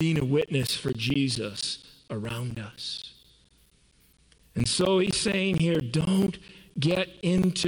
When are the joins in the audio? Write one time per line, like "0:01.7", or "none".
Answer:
none